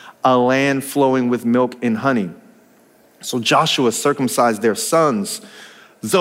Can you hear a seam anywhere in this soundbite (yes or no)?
no